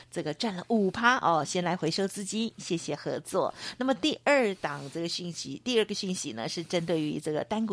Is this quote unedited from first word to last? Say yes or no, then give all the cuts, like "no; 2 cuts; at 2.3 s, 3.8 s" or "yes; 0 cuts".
yes; 0 cuts